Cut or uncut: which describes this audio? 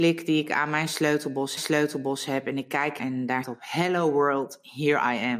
cut